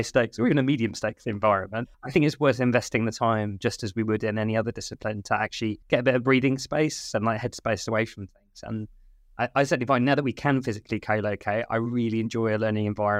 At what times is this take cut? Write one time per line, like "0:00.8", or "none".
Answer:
0:01.9
0:05.8